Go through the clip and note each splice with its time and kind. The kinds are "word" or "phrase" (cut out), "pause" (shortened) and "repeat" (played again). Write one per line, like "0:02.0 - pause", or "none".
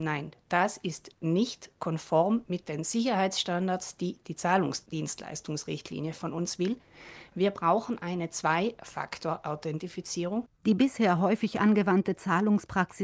0:10.5 - pause